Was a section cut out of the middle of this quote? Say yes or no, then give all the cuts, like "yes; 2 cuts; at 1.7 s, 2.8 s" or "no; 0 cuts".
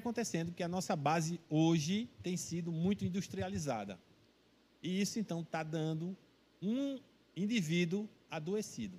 no; 0 cuts